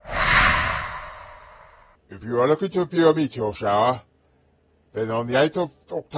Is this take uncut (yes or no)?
yes